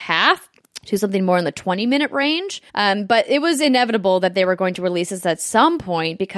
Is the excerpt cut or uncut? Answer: cut